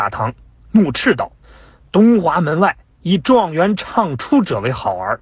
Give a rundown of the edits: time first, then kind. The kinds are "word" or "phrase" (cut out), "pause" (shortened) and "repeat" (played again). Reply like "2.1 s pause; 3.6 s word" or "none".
1.4 s pause